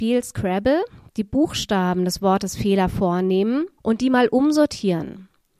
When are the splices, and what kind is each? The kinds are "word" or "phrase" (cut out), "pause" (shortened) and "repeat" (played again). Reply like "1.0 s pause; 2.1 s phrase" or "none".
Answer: 3.8 s pause